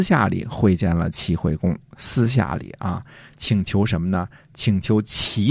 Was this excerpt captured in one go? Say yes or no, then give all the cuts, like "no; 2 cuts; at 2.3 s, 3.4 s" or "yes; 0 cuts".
yes; 0 cuts